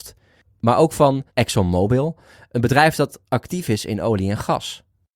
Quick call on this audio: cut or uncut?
cut